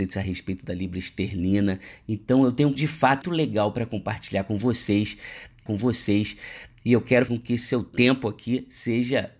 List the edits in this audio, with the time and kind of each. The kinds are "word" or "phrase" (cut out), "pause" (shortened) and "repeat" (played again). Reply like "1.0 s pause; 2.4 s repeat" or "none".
2.7 s word; 3.2 s word; 5.7 s repeat; 7.3 s word